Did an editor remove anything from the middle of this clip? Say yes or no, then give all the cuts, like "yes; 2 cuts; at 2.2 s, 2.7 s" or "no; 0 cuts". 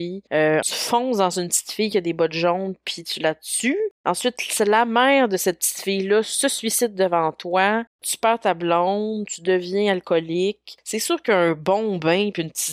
no; 0 cuts